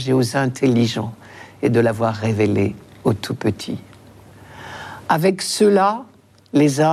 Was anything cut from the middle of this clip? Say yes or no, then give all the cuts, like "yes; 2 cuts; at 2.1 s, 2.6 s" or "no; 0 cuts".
no; 0 cuts